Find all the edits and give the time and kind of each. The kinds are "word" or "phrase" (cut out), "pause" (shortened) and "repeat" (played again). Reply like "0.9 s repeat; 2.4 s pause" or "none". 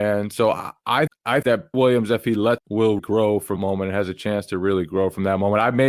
1.1 s word; 1.4 s word; 1.7 s word; 2.6 s word; 3.0 s word; 3.6 s word